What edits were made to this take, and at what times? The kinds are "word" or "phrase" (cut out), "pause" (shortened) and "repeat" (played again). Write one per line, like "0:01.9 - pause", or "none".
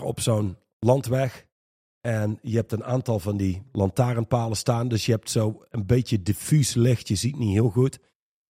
none